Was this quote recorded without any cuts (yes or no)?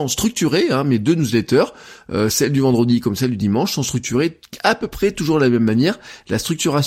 yes